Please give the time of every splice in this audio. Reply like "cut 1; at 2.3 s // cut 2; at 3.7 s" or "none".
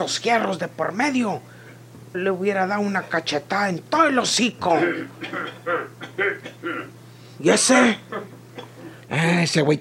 cut 1; at 2.1 s